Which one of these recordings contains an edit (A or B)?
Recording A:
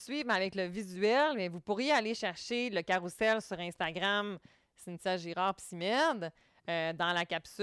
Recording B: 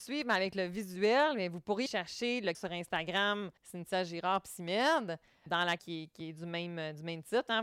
B